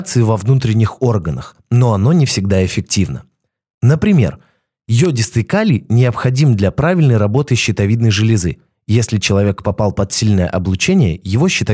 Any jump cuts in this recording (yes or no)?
no